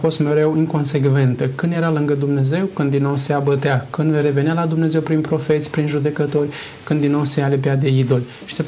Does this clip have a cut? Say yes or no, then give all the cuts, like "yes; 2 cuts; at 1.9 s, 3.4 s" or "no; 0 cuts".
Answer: no; 0 cuts